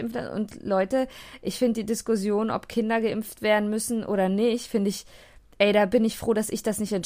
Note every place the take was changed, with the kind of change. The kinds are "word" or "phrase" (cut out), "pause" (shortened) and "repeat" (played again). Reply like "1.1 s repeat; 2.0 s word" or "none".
none